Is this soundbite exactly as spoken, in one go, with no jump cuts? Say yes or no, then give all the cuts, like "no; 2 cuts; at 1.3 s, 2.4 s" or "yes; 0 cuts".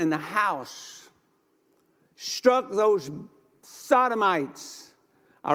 yes; 0 cuts